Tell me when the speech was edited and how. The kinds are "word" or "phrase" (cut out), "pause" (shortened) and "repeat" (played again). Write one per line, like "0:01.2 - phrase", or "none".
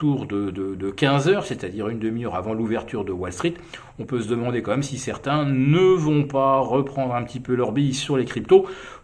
none